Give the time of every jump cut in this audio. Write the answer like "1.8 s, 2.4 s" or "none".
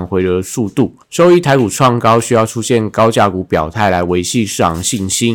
1.0 s